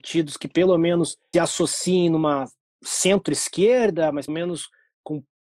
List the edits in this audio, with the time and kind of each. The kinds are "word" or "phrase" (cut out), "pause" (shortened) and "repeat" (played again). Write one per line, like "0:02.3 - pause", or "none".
0:01.3 - word
0:04.3 - word